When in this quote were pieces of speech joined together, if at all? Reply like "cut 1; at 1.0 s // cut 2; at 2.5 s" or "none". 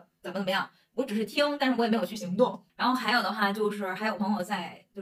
cut 1; at 2.7 s